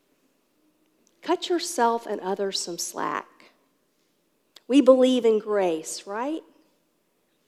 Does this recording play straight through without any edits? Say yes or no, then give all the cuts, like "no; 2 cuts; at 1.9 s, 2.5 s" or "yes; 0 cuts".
yes; 0 cuts